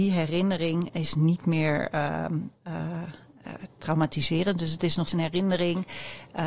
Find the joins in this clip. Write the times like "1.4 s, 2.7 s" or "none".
5.1 s